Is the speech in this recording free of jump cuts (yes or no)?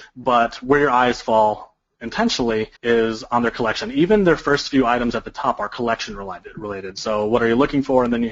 no